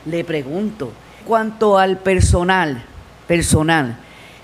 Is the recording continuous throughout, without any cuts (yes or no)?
no